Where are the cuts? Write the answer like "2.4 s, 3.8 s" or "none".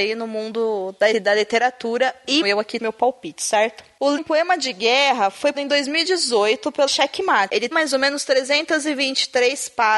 1.1 s, 2.4 s, 2.8 s, 4.2 s, 5.5 s, 6.9 s, 7.7 s